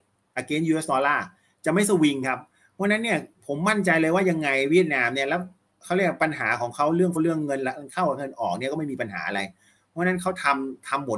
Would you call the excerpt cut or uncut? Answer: cut